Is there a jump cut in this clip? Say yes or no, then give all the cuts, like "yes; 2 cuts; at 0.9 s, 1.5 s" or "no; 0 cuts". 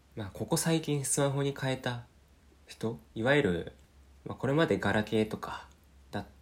yes; 2 cuts; at 3.1 s, 3.8 s